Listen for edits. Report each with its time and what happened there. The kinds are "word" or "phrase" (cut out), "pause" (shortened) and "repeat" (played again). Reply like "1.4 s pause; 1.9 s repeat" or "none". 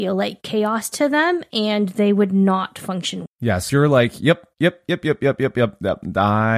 3.3 s word; 3.7 s word